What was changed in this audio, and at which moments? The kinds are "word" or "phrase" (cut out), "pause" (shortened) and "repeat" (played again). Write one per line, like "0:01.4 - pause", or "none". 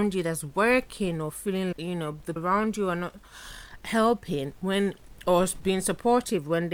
0:01.7 - word
0:02.4 - word